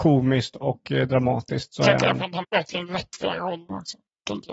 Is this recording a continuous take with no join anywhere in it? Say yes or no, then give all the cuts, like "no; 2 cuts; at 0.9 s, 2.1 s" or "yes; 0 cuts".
no; 1 cut; at 2.4 s